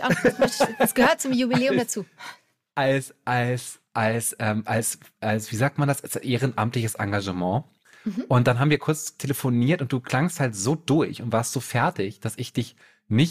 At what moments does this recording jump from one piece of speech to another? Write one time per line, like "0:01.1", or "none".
none